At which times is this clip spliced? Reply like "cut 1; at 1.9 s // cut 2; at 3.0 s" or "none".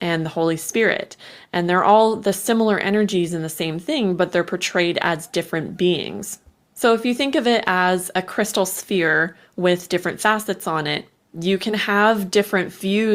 none